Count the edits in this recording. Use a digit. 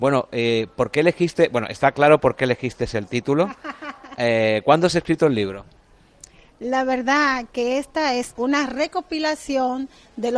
0